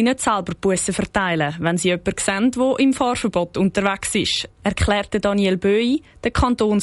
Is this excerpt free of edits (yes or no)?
yes